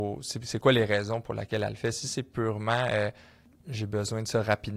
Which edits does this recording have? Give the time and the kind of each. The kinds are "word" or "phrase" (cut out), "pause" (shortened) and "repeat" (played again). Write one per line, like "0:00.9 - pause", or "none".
none